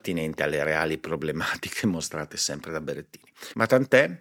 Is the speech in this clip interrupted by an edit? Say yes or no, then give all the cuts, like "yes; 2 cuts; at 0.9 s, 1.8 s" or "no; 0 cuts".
no; 0 cuts